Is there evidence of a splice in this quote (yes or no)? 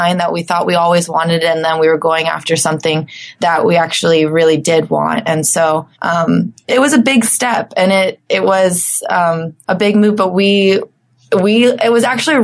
yes